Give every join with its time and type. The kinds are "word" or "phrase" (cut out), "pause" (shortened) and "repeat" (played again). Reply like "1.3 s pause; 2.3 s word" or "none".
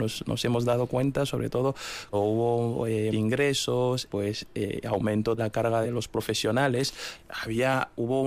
2.1 s word; 3.1 s word; 4.1 s word; 5.4 s word; 5.8 s word